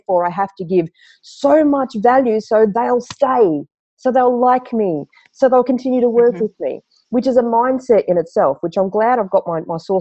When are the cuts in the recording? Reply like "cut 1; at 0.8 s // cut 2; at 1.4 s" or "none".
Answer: none